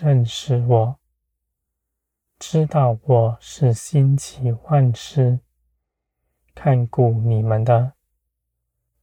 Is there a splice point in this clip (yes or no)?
no